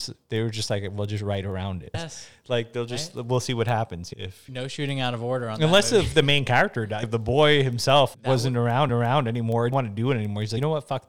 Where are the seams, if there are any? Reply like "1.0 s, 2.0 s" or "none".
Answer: 8.9 s, 9.7 s